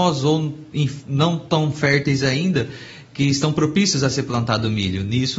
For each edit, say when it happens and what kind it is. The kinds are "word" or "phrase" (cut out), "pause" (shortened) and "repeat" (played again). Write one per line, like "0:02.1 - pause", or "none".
none